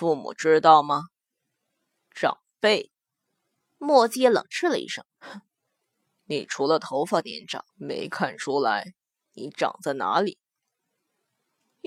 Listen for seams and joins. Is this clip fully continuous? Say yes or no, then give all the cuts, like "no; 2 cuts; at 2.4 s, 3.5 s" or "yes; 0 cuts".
no; 2 cuts; at 5.1 s, 7.7 s